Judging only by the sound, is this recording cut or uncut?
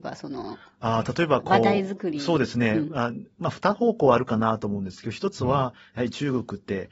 uncut